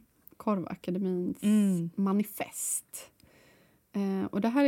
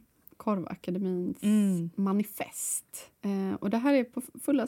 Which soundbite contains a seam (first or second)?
second